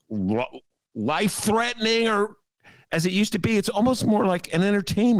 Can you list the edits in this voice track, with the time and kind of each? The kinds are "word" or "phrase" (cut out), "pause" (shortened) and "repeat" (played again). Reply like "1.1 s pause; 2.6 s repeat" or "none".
2.8 s word

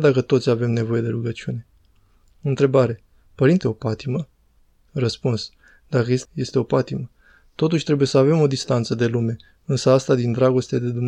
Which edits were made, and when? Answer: 3.6 s phrase; 6.2 s phrase

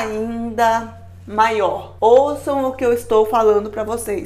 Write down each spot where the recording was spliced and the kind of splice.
2.0 s pause

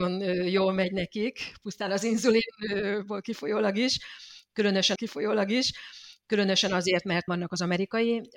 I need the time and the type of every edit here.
5.0 s repeat; 7.3 s word

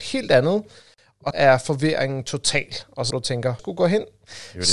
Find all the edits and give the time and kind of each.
1.3 s word; 3.1 s phrase; 3.6 s phrase

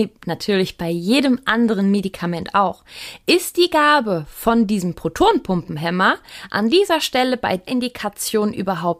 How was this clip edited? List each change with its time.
7.7 s word

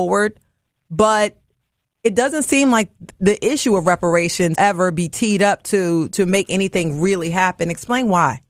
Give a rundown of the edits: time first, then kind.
4.6 s word

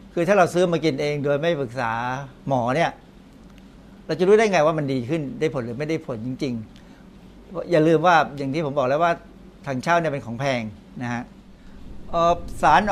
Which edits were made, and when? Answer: 2.4 s pause

